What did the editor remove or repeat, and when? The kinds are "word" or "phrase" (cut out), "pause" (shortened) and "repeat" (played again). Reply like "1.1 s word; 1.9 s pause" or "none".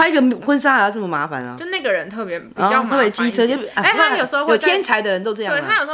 none